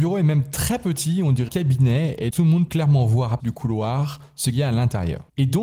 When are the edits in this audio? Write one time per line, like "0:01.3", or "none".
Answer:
0:01.5
0:02.3
0:02.7
0:03.4
0:04.5